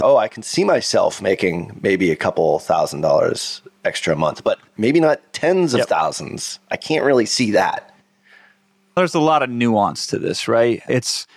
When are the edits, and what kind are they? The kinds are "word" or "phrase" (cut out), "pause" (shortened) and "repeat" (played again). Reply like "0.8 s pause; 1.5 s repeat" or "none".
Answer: none

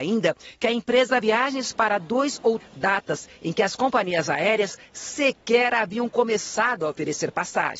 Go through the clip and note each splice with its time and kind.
1.2 s word; 2.6 s phrase

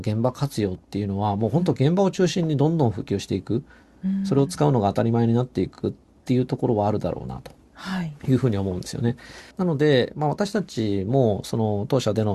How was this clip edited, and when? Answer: 8.2 s pause; 9.5 s pause

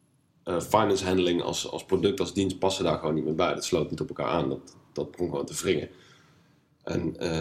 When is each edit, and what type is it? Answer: none

